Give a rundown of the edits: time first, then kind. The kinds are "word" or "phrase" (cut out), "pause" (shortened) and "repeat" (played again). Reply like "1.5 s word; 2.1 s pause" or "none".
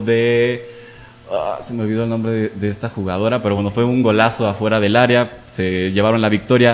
none